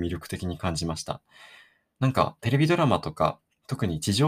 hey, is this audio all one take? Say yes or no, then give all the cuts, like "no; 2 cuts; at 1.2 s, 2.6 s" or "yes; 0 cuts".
yes; 0 cuts